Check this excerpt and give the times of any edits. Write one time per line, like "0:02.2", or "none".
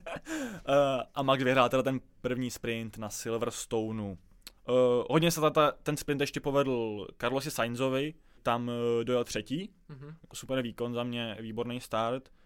0:04.6
0:08.4
0:10.3